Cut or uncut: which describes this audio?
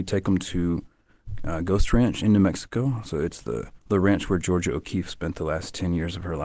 cut